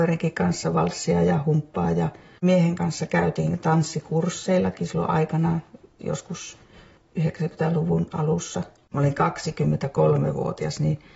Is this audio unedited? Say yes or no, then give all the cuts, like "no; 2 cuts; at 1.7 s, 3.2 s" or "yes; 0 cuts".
yes; 0 cuts